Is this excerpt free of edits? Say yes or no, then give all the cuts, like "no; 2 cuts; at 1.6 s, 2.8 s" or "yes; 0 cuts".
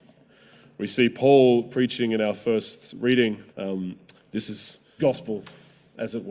no; 2 cuts; at 3.5 s, 5.0 s